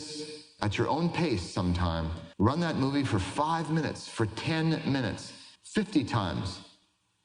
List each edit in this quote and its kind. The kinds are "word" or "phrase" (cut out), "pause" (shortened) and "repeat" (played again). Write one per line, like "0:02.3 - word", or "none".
0:02.3 - pause
0:05.6 - pause